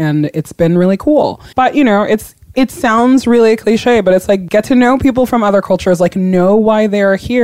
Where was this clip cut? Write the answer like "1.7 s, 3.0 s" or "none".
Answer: 1.5 s